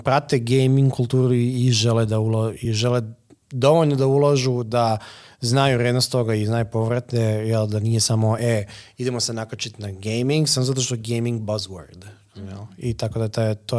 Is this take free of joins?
yes; 0 cuts

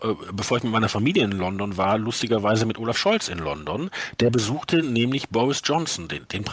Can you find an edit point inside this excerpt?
no; 0 cuts

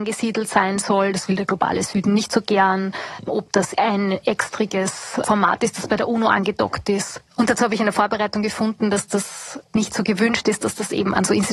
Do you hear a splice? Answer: no; 0 cuts

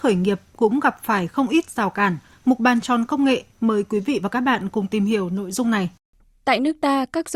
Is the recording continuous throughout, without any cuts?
yes; 0 cuts

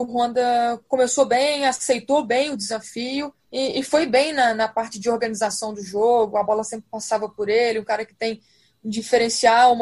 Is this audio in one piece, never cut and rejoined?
no; 1 cut; at 3.4 s

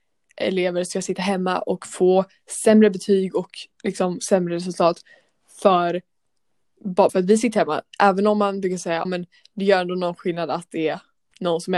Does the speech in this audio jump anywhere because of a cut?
yes; 2 cuts; at 7.1 s, 9.0 s

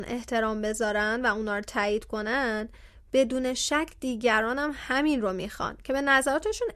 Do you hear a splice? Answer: no; 0 cuts

